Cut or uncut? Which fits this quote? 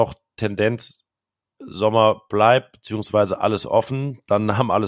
uncut